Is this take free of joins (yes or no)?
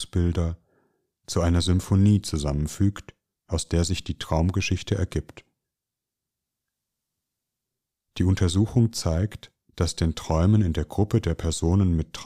yes